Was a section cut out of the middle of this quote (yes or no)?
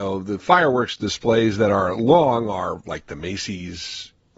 no